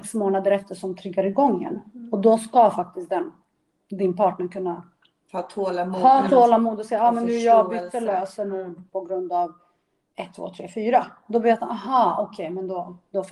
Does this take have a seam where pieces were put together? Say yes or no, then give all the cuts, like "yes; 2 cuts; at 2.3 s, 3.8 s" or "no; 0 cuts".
no; 0 cuts